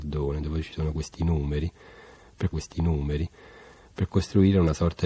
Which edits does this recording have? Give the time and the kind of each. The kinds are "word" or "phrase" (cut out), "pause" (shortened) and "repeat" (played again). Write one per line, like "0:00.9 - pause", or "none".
0:02.5 - repeat